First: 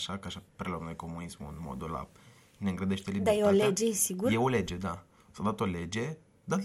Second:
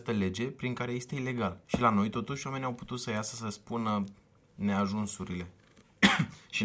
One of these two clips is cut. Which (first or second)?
second